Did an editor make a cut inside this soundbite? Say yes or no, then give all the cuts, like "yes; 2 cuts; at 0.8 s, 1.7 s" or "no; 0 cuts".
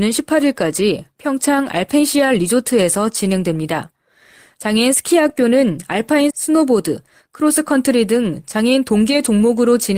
yes; 1 cut; at 6.3 s